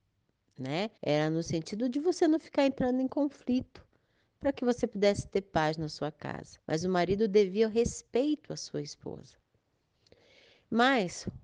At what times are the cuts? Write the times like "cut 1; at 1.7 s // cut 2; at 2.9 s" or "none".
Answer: cut 1; at 1.0 s // cut 2; at 6.6 s